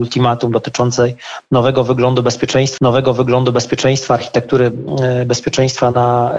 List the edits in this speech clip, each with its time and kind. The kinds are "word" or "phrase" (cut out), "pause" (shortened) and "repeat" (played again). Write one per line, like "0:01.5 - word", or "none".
0:02.8 - repeat